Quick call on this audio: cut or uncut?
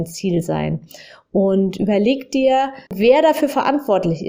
cut